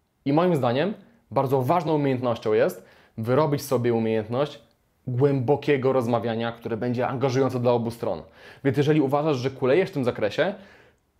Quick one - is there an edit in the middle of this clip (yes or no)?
no